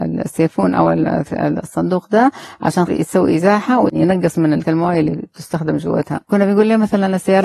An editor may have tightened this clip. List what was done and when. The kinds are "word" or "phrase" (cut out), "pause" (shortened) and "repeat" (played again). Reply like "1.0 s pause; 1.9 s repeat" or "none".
2.9 s word; 4.6 s word; 6.2 s pause